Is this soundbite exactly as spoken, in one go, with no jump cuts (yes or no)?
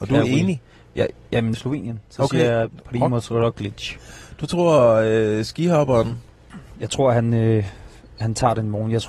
no